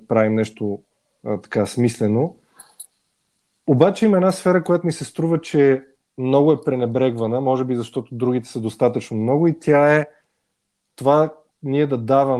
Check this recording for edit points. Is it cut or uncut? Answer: uncut